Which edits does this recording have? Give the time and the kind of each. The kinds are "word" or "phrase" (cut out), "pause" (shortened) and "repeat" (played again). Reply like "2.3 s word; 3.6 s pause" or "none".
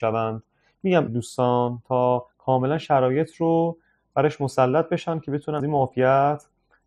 1.1 s phrase; 2.3 s pause; 5.6 s word